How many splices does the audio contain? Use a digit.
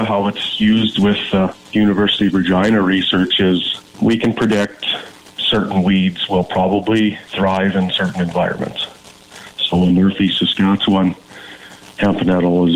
0